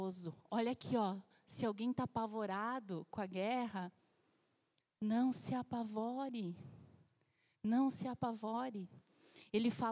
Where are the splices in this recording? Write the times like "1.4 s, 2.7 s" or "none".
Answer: none